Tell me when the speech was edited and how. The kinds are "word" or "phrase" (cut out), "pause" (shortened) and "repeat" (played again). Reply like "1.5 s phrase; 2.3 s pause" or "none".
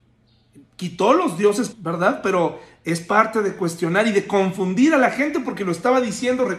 1.7 s word